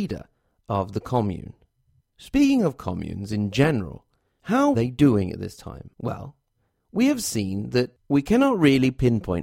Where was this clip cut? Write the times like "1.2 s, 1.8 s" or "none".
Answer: 2.0 s, 4.7 s, 5.9 s